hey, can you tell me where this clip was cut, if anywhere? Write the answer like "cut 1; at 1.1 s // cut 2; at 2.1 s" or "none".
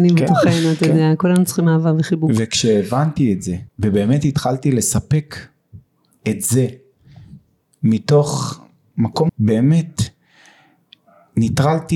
cut 1; at 3.7 s // cut 2; at 9.3 s